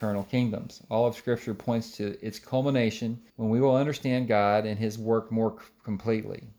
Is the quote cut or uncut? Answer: cut